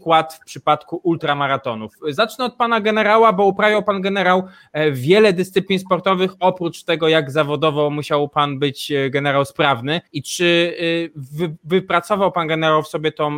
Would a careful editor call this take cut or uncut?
cut